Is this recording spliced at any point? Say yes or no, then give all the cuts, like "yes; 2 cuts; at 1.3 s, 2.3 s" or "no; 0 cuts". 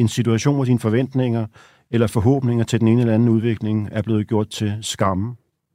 no; 0 cuts